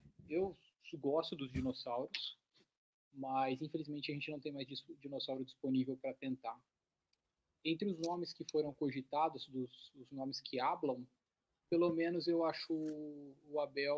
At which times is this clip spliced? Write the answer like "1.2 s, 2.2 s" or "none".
none